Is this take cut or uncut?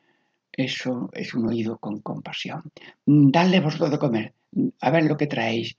uncut